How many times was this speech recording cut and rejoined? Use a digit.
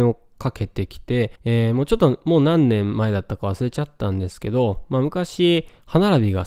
1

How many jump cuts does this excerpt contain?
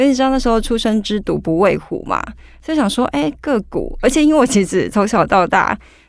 0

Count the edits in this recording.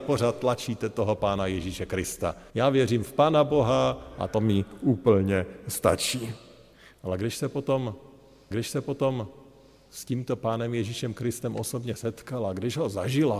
2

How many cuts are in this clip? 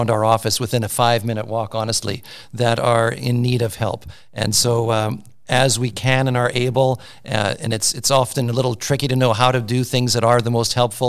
0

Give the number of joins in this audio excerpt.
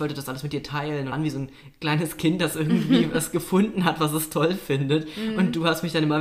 1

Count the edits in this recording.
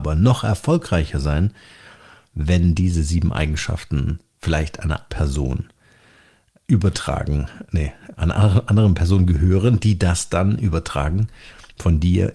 1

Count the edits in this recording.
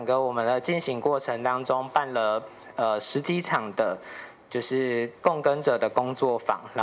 1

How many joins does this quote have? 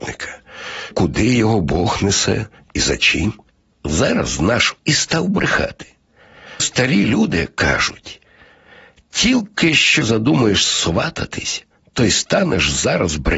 4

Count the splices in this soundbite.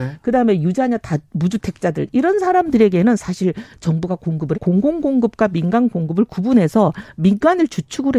1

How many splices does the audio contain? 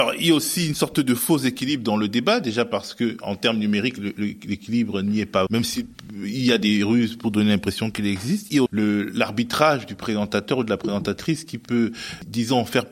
2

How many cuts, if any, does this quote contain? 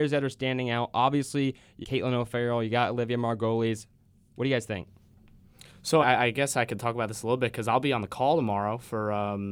2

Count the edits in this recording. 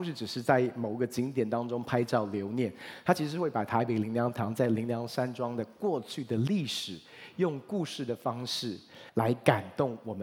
1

